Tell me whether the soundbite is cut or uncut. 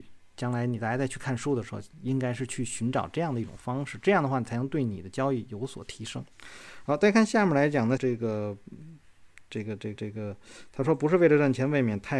cut